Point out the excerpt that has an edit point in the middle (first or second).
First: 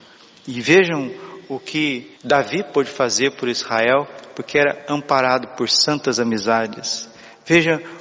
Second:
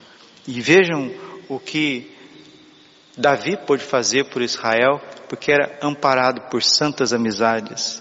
first